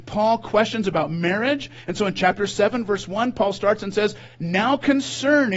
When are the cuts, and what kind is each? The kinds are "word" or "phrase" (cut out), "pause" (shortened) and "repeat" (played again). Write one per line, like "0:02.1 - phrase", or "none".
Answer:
none